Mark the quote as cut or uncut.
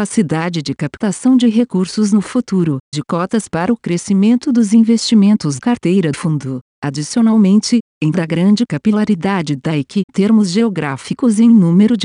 cut